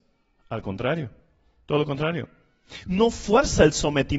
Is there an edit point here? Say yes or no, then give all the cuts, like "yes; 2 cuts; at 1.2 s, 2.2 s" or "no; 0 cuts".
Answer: no; 0 cuts